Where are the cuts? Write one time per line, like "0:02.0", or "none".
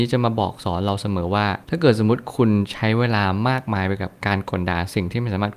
0:01.6